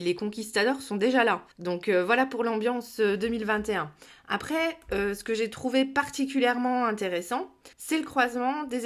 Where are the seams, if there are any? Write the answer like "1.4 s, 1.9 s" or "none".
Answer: 1.5 s, 7.7 s